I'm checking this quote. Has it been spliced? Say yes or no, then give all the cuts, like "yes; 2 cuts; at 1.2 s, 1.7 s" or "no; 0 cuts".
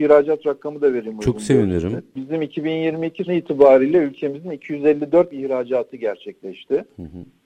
yes; 2 cuts; at 3.3 s, 5.3 s